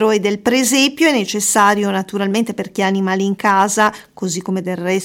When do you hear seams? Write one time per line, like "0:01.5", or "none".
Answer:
none